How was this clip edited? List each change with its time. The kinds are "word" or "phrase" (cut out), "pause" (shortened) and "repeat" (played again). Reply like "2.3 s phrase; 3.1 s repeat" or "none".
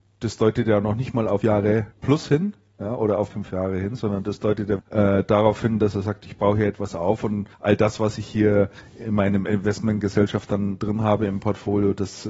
1.4 s word; 1.9 s pause; 3.3 s word; 4.8 s word; 7.5 s pause